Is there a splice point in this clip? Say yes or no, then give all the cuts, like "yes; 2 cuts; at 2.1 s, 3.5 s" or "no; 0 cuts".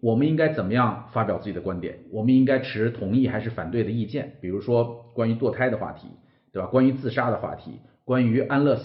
no; 0 cuts